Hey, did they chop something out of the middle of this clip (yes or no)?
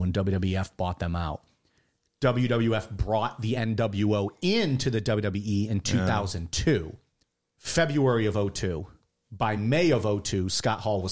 no